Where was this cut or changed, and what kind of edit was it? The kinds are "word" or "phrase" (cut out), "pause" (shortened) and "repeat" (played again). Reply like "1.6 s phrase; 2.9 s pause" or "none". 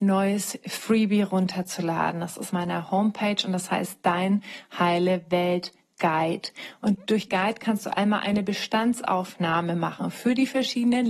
2.5 s word; 7.3 s word